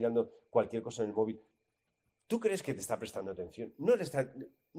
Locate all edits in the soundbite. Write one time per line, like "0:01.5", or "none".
none